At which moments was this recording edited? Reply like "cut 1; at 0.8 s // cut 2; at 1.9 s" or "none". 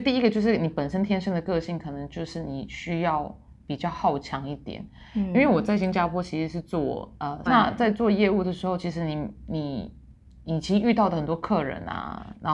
cut 1; at 7.5 s